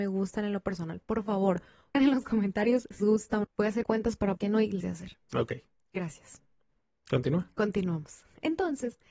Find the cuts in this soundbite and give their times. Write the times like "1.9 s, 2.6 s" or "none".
1.9 s, 3.0 s, 3.4 s, 3.8 s, 4.4 s, 4.8 s